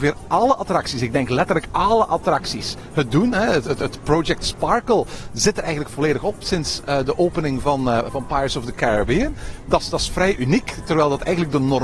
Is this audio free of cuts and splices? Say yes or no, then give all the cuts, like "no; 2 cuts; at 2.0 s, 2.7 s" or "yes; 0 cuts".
yes; 0 cuts